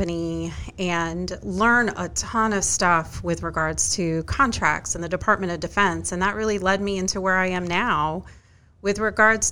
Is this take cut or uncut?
uncut